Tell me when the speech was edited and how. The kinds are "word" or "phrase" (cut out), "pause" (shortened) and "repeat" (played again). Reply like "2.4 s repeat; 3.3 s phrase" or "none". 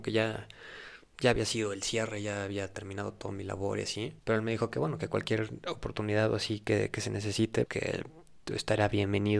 4.2 s pause; 7.7 s word